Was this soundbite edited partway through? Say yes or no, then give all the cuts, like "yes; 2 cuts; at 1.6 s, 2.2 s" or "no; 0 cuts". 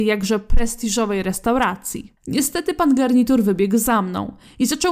yes; 1 cut; at 2.2 s